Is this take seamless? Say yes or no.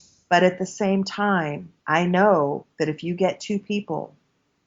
no